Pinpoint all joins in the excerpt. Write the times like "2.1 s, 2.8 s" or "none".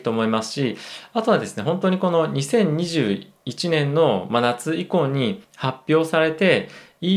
5.4 s